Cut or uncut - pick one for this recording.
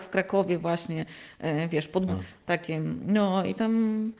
cut